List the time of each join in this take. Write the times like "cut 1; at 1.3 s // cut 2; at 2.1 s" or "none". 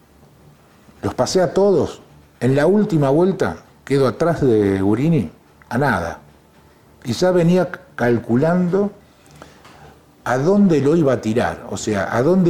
none